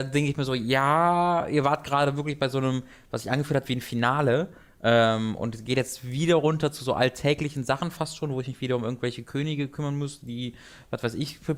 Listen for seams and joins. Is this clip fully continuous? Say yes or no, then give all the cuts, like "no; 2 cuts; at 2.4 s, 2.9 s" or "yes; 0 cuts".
yes; 0 cuts